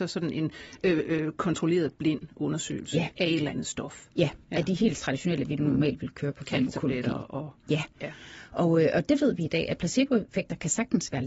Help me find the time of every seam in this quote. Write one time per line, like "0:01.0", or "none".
0:04.4